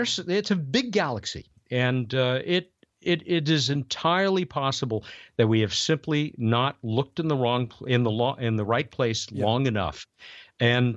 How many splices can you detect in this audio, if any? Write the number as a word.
zero